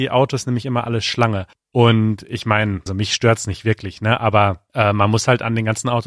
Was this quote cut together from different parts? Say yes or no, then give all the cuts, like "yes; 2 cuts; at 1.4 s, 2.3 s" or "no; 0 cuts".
yes; 3 cuts; at 1.5 s, 2.9 s, 4.7 s